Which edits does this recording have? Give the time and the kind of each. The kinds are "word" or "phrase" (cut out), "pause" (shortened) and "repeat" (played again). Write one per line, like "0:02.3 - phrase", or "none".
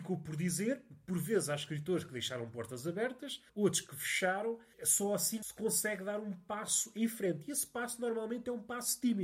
0:03.5 - pause